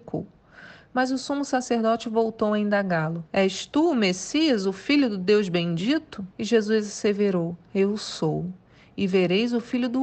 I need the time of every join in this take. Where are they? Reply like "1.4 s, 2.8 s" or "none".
3.3 s, 6.3 s